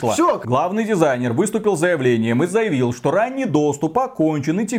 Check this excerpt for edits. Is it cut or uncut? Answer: uncut